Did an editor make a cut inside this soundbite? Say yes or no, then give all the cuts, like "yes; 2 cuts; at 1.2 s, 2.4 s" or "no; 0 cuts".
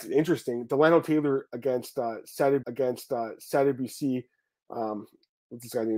yes; 1 cut; at 2.6 s